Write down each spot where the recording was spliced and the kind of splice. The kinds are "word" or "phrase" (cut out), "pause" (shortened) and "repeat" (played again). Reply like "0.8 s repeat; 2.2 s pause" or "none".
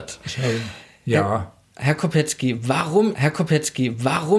3.1 s repeat